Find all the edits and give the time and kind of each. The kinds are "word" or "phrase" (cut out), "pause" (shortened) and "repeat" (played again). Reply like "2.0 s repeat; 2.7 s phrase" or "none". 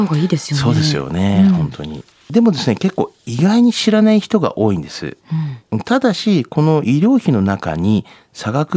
3.2 s pause